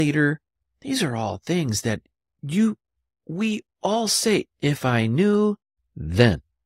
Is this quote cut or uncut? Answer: uncut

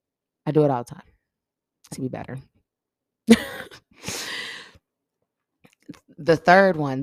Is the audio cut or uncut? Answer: cut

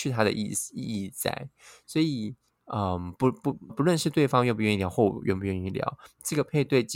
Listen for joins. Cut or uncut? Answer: cut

